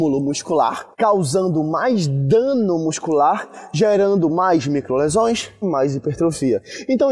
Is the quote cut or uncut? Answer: cut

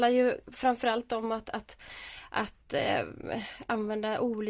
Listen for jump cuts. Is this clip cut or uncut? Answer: uncut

